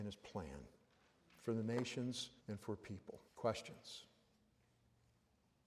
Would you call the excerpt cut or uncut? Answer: cut